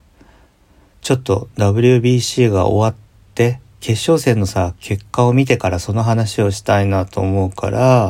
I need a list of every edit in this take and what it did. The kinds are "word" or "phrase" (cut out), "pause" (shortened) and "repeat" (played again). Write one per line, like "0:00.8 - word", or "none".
none